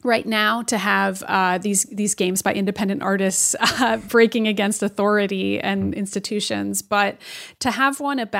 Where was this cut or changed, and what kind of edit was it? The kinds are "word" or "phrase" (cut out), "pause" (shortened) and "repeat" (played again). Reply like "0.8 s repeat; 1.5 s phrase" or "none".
none